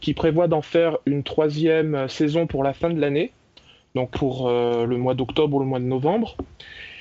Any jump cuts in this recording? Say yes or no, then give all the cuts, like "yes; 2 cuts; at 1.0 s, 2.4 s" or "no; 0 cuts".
yes; 1 cut; at 4.1 s